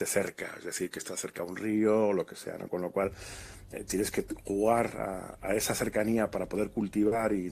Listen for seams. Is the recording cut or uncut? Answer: uncut